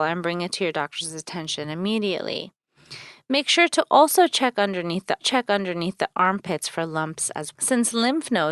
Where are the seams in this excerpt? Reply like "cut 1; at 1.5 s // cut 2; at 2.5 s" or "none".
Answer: cut 1; at 5.2 s // cut 2; at 7.5 s